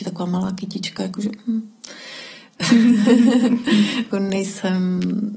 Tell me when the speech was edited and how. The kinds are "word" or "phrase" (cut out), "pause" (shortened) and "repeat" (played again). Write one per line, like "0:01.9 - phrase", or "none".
0:04.1 - phrase